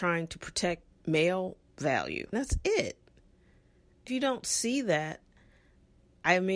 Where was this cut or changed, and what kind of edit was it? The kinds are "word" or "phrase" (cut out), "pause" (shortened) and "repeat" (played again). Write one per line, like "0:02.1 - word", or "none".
0:01.0 - word
0:02.3 - word
0:04.1 - word